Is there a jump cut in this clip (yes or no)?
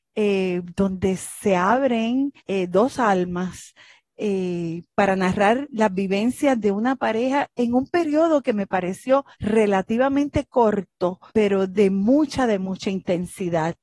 yes